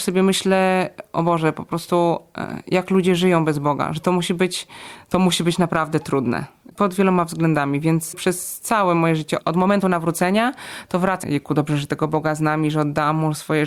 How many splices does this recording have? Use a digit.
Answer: 1